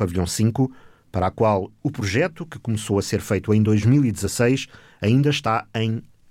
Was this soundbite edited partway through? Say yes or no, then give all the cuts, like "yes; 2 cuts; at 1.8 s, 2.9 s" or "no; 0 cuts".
no; 0 cuts